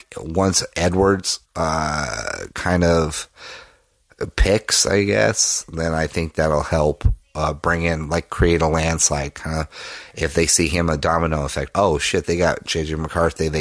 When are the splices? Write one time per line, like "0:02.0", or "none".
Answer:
0:01.5
0:11.7